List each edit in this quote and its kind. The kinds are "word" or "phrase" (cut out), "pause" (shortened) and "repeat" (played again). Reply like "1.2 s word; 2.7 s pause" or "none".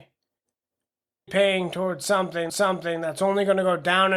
1.3 s word; 2.5 s repeat